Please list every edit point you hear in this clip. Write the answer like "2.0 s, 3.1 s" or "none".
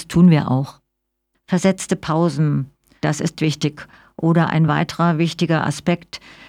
none